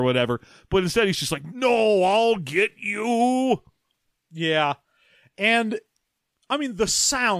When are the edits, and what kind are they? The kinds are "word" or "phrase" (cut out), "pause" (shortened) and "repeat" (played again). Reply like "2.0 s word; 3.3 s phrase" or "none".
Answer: none